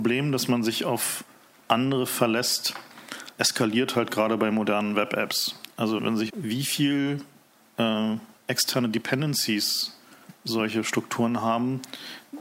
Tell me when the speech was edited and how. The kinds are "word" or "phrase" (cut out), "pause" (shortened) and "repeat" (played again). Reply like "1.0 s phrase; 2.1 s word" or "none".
3.4 s word; 6.0 s word; 6.3 s word